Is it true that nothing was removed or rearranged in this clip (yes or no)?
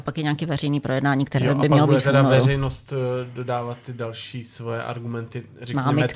yes